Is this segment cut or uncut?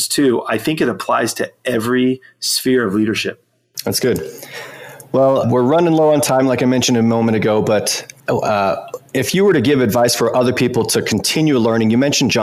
cut